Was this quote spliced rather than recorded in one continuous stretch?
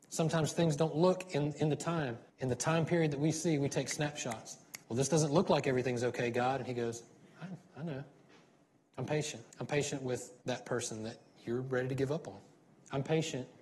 yes; 4 cuts; at 2.3 s, 4.8 s, 9.5 s, 10.4 s

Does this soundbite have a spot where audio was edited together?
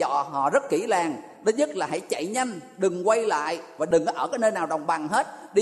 no; 0 cuts

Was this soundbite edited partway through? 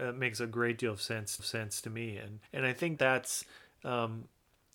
yes; 3 cuts; at 1.4 s, 2.5 s, 3.0 s

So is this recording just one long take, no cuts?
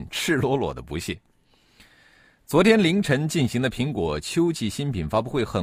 yes; 0 cuts

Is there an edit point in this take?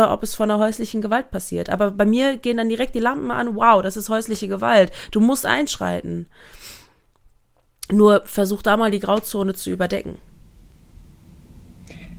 no; 0 cuts

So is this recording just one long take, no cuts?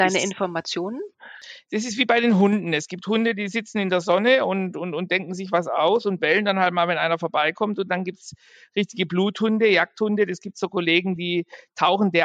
yes; 0 cuts

